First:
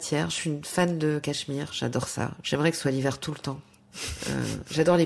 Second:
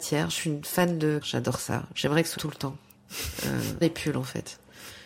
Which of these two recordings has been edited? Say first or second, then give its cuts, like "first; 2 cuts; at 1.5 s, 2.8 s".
second; 3 cuts; at 1.2 s, 2.4 s, 3.8 s